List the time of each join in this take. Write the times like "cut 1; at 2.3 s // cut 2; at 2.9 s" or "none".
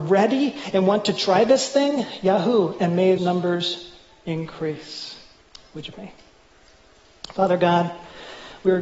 cut 1; at 3.2 s // cut 2; at 5.4 s // cut 3; at 5.9 s